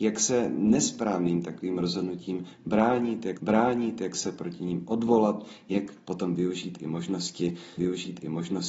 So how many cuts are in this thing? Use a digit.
2